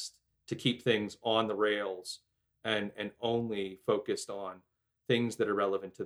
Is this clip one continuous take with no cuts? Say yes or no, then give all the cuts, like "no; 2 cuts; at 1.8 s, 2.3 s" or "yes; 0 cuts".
yes; 0 cuts